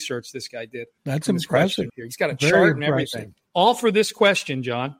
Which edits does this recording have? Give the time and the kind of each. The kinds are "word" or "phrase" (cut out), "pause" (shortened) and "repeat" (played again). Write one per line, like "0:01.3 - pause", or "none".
0:01.0 - pause
0:01.9 - phrase
0:03.5 - pause